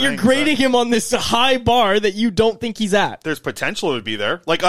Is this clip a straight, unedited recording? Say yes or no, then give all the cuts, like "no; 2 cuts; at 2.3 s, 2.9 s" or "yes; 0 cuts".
yes; 0 cuts